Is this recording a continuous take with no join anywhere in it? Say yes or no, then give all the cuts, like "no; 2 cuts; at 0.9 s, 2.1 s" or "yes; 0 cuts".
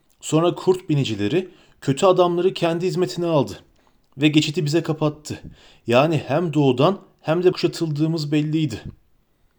no; 1 cut; at 7.5 s